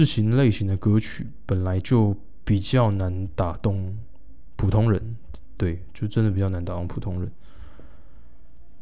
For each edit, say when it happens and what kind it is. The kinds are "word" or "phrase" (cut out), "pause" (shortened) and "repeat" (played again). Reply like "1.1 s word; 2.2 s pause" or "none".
none

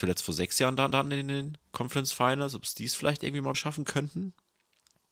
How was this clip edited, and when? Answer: 0.9 s repeat; 1.6 s pause; 3.5 s word

